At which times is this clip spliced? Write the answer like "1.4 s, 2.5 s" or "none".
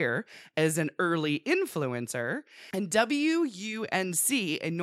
none